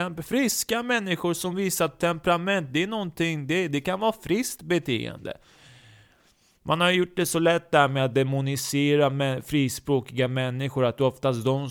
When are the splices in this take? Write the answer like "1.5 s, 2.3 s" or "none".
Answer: none